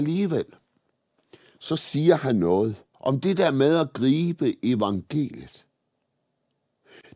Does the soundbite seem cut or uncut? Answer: cut